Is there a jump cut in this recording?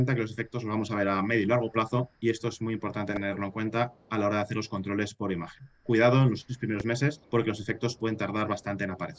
yes; 2 cuts; at 2.2 s, 7.2 s

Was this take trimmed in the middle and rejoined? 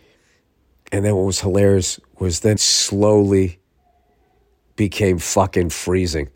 yes; 1 cut; at 2.6 s

